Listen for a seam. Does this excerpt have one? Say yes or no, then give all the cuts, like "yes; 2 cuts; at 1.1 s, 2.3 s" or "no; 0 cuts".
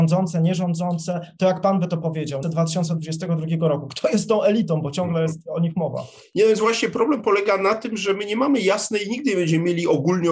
yes; 1 cut; at 2.4 s